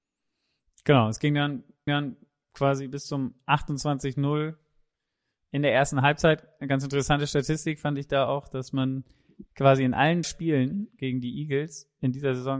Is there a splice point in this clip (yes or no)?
yes